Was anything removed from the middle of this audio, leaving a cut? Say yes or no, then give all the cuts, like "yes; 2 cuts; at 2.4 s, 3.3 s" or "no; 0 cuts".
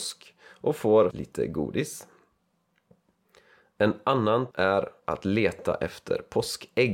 yes; 2 cuts; at 1.1 s, 4.5 s